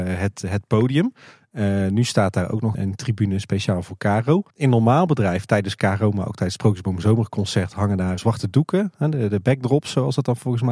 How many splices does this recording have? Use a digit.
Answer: 3